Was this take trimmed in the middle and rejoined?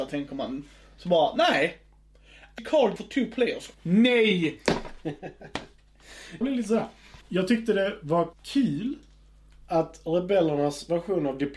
yes; 6 cuts; at 2.6 s, 3.0 s, 3.7 s, 6.4 s, 7.2 s, 8.3 s

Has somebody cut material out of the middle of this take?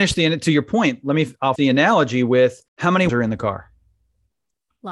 yes; 3 cuts; at 1.6 s, 2.7 s, 3.1 s

